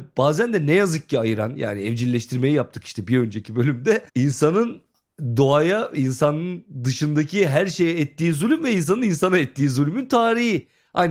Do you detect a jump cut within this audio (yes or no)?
yes